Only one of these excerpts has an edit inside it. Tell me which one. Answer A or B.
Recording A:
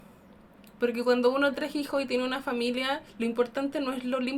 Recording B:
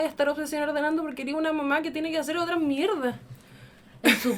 A